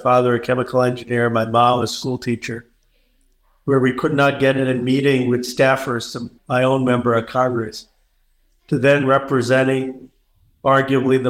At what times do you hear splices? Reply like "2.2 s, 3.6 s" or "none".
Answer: 6.4 s